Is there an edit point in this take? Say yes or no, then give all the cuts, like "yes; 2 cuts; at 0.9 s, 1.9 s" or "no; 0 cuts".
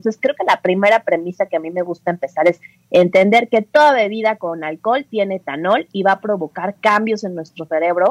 no; 0 cuts